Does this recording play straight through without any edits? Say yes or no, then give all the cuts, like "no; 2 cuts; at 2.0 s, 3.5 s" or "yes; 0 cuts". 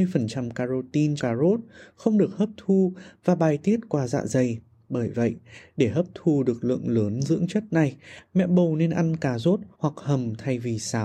no; 2 cuts; at 1.2 s, 9.7 s